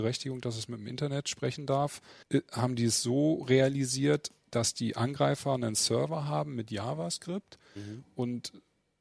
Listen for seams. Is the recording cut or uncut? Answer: cut